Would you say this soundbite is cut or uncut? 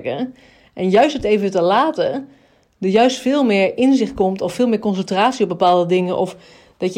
uncut